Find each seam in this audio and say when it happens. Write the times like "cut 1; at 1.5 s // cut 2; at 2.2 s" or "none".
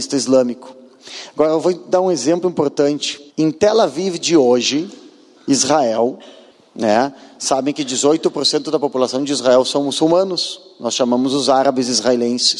cut 1; at 3.3 s // cut 2; at 6.5 s